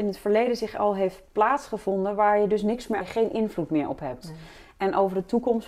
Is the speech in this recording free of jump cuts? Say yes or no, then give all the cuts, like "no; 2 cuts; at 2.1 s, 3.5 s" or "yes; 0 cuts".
no; 2 cuts; at 1.3 s, 3.0 s